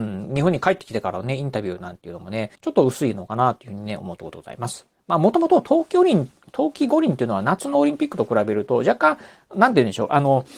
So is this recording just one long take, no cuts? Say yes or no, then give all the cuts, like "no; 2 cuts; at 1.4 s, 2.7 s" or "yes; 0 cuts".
no; 1 cut; at 2.5 s